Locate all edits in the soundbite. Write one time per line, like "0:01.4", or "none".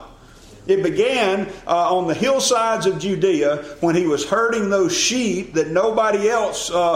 none